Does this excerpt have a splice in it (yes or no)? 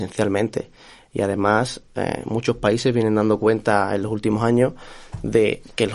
no